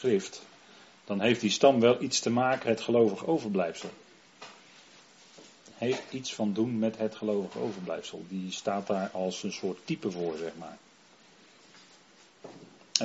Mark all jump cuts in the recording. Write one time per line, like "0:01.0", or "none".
0:02.6
0:05.7